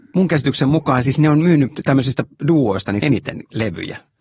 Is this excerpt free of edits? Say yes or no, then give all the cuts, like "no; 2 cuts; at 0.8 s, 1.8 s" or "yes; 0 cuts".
no; 1 cut; at 3.0 s